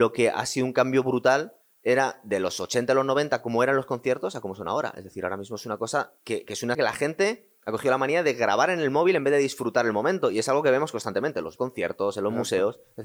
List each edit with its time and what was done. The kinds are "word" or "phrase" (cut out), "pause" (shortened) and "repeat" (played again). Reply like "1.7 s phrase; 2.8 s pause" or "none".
1.6 s pause; 6.2 s pause; 6.7 s word; 11.6 s phrase